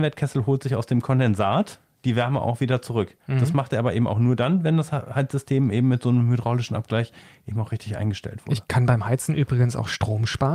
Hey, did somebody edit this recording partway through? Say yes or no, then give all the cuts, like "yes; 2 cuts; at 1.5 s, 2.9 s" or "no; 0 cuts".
no; 0 cuts